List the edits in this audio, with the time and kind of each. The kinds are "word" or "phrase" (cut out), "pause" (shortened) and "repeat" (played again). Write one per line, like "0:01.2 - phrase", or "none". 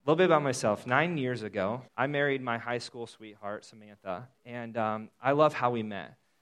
0:01.9 - pause
0:04.4 - pause